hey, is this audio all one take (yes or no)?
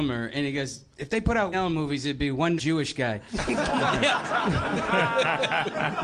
no